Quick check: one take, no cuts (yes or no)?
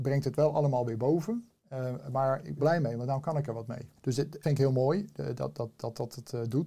no